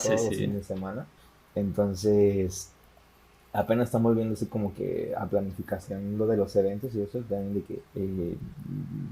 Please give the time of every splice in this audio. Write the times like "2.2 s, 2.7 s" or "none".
1.2 s, 7.9 s